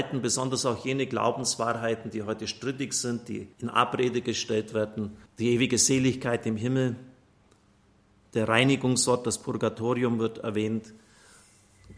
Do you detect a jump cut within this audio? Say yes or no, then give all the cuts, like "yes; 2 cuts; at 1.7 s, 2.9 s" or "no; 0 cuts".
yes; 2 cuts; at 3.5 s, 5.3 s